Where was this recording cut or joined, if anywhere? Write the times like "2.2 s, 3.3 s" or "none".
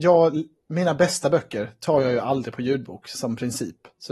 none